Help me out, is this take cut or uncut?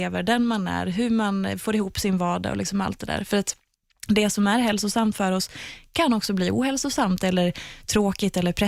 uncut